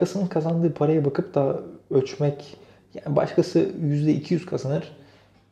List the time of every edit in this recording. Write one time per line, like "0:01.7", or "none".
none